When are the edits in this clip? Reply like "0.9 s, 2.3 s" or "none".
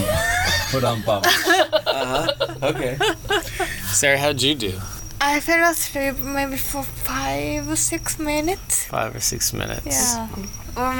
none